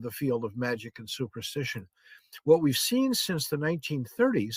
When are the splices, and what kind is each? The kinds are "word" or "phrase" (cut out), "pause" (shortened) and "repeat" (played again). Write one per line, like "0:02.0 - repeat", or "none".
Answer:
none